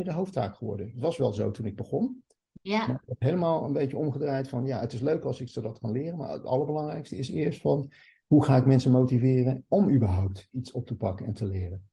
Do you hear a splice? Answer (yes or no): no